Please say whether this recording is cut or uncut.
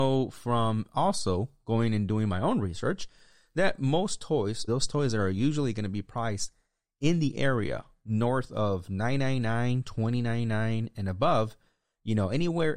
cut